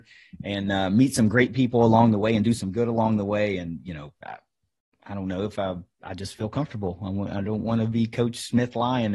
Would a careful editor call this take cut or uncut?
cut